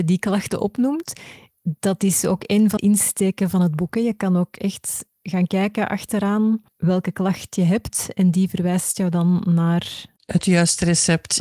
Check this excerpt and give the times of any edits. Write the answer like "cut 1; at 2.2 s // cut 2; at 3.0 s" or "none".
cut 1; at 2.8 s // cut 2; at 6.7 s